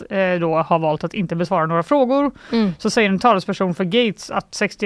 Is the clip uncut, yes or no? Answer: yes